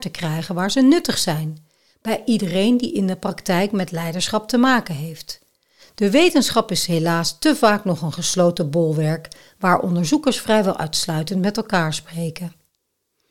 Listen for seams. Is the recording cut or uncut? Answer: uncut